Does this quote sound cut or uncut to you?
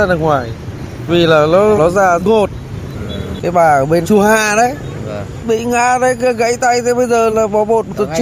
cut